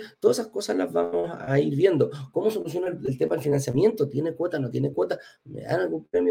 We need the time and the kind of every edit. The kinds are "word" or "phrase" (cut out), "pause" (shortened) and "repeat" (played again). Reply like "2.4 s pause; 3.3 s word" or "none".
none

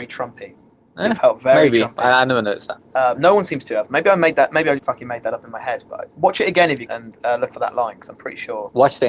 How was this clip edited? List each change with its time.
4.8 s word; 6.9 s word; 7.5 s word

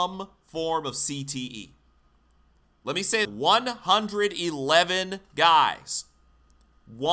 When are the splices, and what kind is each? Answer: 3.2 s phrase

